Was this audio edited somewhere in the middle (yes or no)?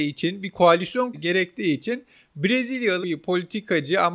yes